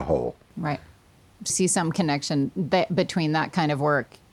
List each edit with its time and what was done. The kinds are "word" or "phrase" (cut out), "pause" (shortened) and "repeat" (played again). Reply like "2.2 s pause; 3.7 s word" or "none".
1.5 s word